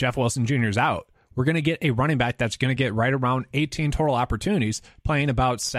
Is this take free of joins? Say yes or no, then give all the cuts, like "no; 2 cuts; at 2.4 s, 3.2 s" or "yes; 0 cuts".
yes; 0 cuts